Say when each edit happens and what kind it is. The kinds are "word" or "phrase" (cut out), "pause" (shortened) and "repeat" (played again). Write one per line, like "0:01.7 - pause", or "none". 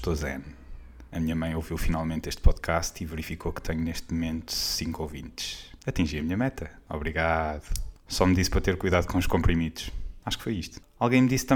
0:01.1 - pause